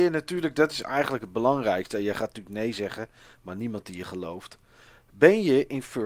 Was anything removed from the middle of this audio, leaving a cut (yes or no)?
no